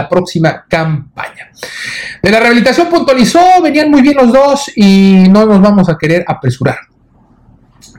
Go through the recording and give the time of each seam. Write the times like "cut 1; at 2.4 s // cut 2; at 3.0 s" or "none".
none